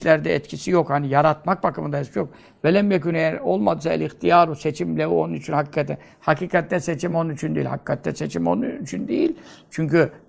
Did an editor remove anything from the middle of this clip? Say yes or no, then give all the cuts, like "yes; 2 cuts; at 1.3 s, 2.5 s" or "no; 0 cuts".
no; 0 cuts